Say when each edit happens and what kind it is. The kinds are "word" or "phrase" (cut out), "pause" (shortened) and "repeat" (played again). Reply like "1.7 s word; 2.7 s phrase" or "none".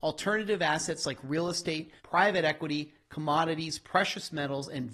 2.0 s pause